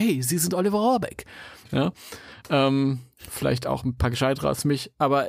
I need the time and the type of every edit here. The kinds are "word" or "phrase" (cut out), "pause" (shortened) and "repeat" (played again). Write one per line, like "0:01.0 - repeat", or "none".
none